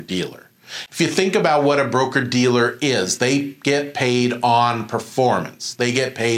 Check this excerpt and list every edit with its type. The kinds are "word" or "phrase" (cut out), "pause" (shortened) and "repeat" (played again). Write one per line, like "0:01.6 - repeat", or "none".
none